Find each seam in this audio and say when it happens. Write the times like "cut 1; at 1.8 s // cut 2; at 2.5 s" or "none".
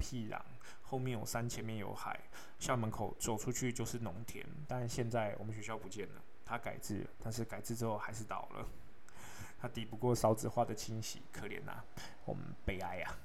none

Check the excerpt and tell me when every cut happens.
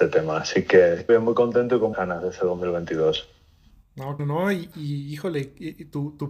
cut 1; at 1.1 s // cut 2; at 1.9 s // cut 3; at 4.2 s // cut 4; at 4.7 s

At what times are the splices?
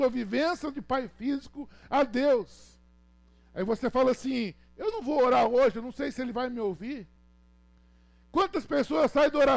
none

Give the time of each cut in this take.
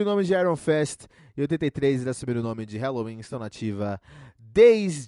none

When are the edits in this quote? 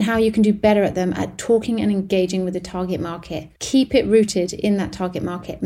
cut 1; at 3.6 s

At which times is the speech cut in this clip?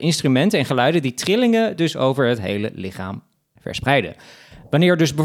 none

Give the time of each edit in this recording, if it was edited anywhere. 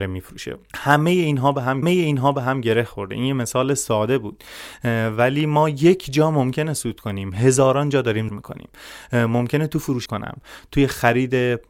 cut 1; at 1.8 s // cut 2; at 8.3 s // cut 3; at 10.1 s

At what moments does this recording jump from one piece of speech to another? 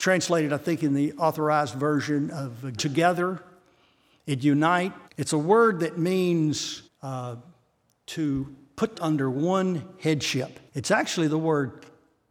cut 1; at 2.8 s // cut 2; at 5.1 s // cut 3; at 6.9 s // cut 4; at 8.9 s // cut 5; at 10.7 s

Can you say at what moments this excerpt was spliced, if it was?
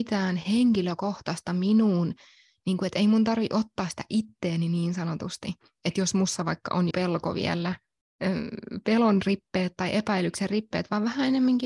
cut 1; at 6.9 s

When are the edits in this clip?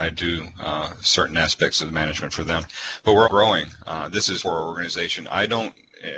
cut 1; at 3.2 s // cut 2; at 4.4 s

